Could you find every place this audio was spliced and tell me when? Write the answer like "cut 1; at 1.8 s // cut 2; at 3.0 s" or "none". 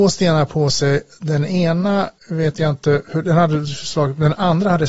cut 1; at 2.2 s